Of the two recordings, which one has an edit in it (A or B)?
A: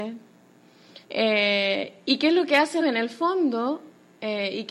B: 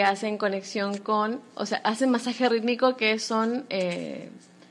A